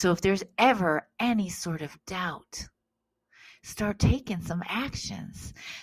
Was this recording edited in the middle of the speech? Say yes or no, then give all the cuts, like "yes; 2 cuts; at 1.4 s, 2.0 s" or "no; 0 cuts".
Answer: no; 0 cuts